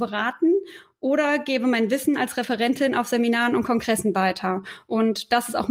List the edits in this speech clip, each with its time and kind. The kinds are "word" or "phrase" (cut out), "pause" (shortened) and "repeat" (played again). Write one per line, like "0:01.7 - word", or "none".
none